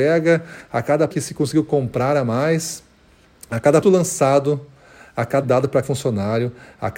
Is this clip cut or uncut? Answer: cut